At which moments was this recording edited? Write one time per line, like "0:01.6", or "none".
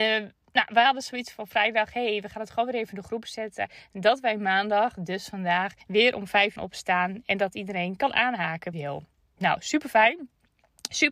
0:05.8
0:06.6
0:08.7